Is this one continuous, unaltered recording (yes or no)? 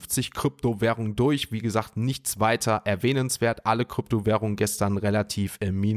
yes